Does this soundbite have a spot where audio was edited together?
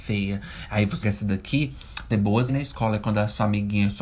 yes; 3 cuts; at 1.0 s, 2.1 s, 2.5 s

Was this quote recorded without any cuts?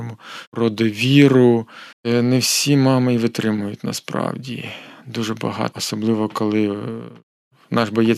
no; 2 cuts; at 1.9 s, 5.7 s

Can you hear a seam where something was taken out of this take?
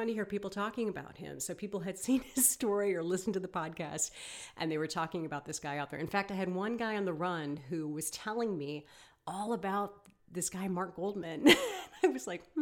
no; 0 cuts

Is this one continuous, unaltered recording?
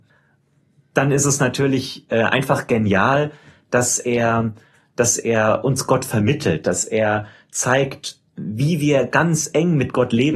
yes; 0 cuts

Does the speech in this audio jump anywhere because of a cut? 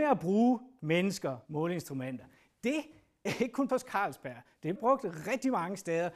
yes; 4 cuts; at 1.4 s, 3.3 s, 3.7 s, 4.8 s

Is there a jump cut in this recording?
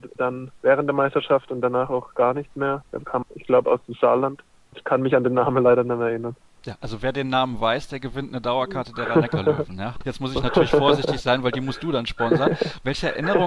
no; 0 cuts

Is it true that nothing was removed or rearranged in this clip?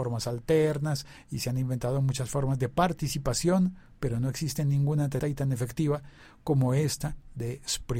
no; 1 cut; at 5.2 s

